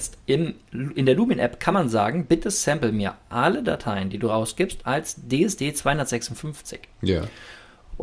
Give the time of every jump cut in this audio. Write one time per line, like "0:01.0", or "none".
none